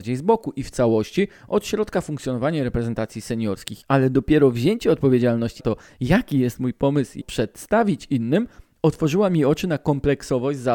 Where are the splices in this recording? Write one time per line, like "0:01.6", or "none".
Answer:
0:03.8
0:05.6
0:07.2